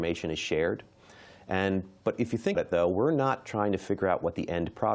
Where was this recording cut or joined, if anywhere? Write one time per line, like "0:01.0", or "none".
0:02.5